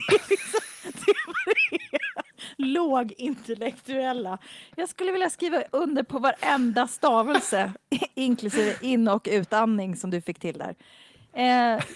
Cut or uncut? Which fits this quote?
uncut